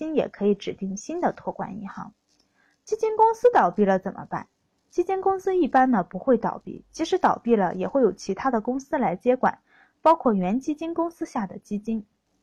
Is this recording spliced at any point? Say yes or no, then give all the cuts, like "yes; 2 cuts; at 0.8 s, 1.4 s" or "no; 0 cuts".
no; 0 cuts